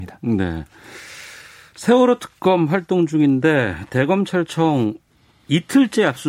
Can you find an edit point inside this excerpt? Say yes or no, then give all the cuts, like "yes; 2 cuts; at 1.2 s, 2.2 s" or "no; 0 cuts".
no; 0 cuts